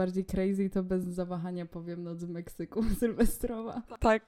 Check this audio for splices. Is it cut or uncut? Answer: uncut